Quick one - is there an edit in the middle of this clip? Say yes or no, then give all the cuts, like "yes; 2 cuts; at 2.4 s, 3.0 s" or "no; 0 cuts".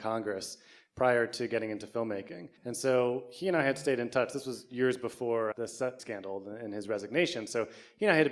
yes; 3 cuts; at 2.6 s, 5.5 s, 6.0 s